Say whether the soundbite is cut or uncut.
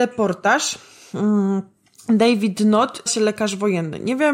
cut